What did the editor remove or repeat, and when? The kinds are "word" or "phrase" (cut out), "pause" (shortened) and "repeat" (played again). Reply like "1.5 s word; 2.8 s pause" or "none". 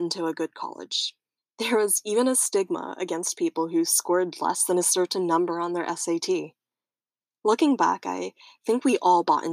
1.4 s pause